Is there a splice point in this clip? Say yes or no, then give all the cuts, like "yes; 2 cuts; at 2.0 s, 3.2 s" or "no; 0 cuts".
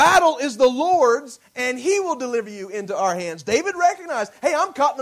no; 0 cuts